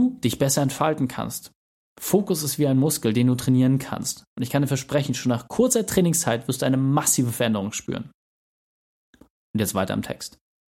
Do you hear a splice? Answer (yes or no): no